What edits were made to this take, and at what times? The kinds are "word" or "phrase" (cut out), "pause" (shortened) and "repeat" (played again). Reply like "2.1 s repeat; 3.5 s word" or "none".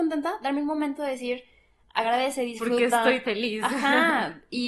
3.2 s word